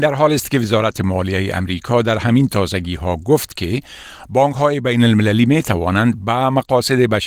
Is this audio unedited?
yes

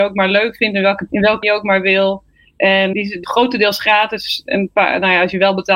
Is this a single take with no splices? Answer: no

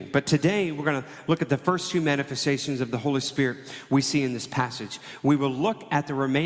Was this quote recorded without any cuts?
yes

